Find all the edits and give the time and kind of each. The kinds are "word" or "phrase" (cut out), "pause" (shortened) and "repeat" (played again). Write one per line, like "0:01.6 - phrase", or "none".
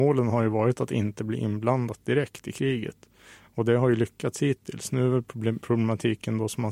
none